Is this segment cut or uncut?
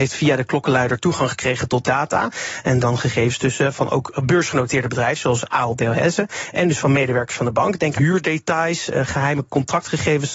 cut